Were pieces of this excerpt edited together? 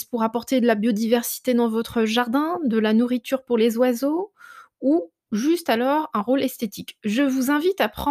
no; 0 cuts

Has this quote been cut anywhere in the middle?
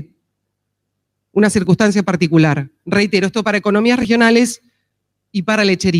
no; 0 cuts

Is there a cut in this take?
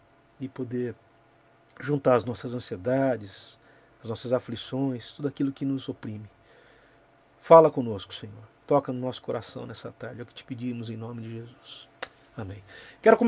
no; 0 cuts

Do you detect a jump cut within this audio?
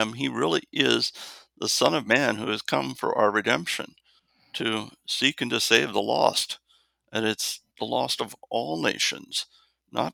no; 0 cuts

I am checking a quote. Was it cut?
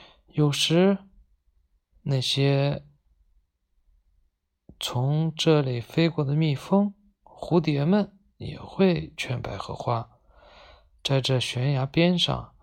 no; 0 cuts

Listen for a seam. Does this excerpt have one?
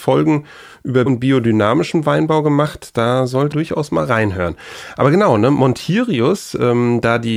yes; 2 cuts; at 1.1 s, 3.5 s

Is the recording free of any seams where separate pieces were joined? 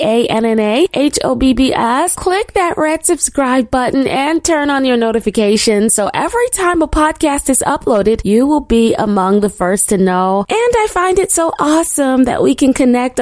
yes; 0 cuts

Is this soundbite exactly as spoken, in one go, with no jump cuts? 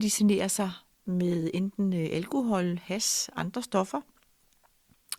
yes; 0 cuts

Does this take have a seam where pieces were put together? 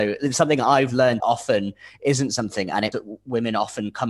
yes; 2 cuts; at 1.2 s, 2.9 s

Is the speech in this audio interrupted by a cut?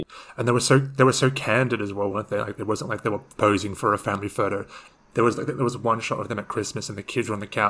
no; 0 cuts

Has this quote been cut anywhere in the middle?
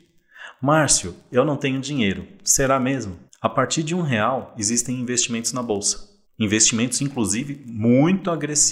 yes; 2 cuts; at 3.3 s, 6.2 s

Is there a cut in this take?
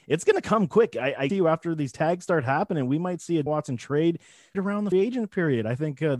yes; 4 cuts; at 1.3 s, 3.5 s, 4.5 s, 4.9 s

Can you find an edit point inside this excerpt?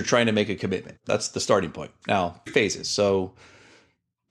yes; 2 cuts; at 1.0 s, 2.5 s

